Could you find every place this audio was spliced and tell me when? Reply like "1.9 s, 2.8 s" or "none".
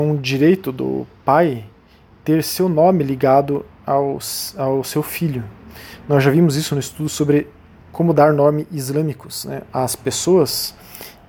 none

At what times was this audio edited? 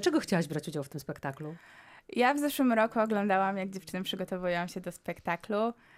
none

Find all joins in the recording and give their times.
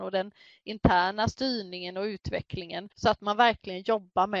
2.9 s

